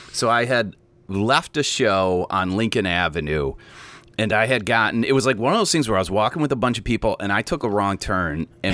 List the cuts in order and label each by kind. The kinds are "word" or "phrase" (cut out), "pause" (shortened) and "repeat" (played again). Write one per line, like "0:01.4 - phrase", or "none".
none